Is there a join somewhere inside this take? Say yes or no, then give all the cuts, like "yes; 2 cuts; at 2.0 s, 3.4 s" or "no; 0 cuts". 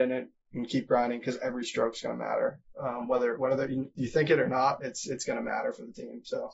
no; 0 cuts